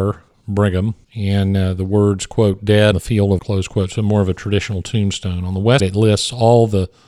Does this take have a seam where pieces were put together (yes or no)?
yes